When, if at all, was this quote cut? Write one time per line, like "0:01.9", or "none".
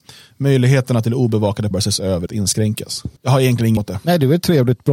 0:01.7
0:02.3
0:03.2
0:03.8

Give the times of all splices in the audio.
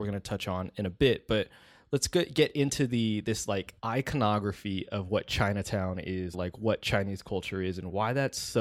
0:03.8
0:06.3

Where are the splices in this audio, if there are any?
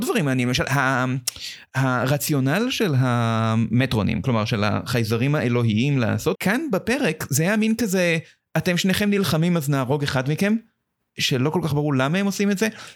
0:06.3

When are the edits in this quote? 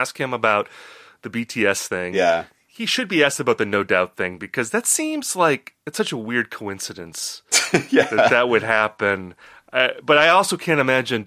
none

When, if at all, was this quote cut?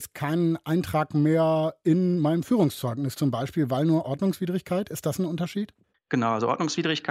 none

